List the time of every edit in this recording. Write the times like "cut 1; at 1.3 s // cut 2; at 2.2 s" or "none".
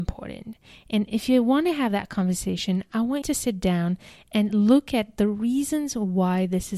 cut 1; at 3.2 s